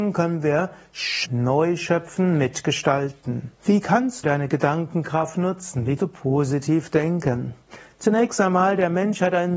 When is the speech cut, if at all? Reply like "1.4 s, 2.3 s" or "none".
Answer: 1.2 s, 3.5 s, 4.2 s, 6.0 s